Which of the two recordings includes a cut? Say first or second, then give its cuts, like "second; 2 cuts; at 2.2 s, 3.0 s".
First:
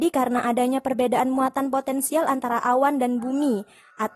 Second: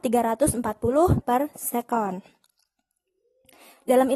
second; 1 cut; at 1.2 s